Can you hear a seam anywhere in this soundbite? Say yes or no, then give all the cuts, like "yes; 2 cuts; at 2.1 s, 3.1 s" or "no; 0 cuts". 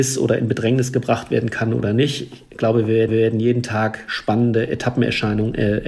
yes; 1 cut; at 3.1 s